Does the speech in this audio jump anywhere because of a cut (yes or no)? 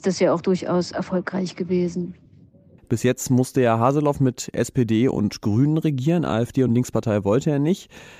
no